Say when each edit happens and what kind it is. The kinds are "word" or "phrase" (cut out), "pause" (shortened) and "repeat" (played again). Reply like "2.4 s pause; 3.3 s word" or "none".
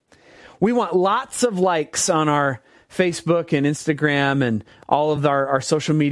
none